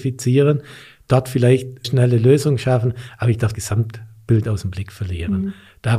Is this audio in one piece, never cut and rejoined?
no; 3 cuts; at 1.8 s, 3.5 s, 4.4 s

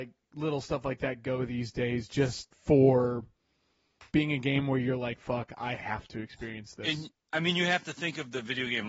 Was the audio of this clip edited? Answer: yes; 1 cut; at 4.1 s

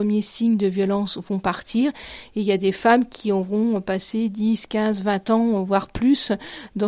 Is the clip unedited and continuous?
yes; 0 cuts

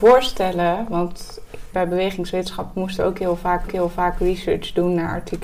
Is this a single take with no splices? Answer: no; 2 cuts; at 1.7 s, 3.7 s

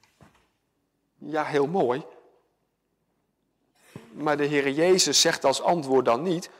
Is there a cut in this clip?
no; 0 cuts

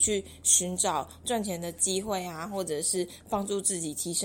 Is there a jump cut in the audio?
no; 0 cuts

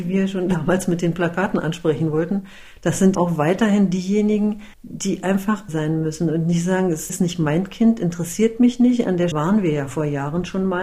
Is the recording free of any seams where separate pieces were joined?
no; 5 cuts; at 3.1 s, 4.7 s, 5.7 s, 7.1 s, 9.3 s

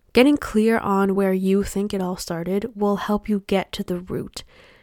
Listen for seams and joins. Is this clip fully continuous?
yes; 0 cuts

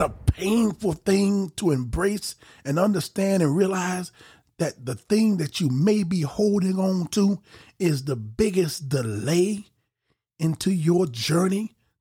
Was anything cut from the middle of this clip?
no; 0 cuts

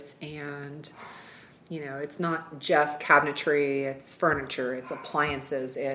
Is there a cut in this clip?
no; 0 cuts

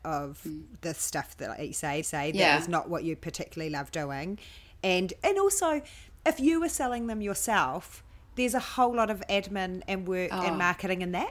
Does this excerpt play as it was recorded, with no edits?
no; 1 cut; at 2.0 s

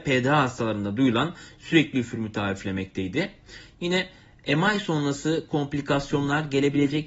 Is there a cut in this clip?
no; 0 cuts

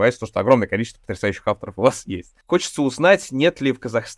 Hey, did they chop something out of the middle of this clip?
yes; 1 cut; at 2.4 s

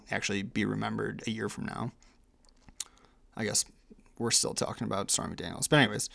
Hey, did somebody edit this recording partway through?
no; 0 cuts

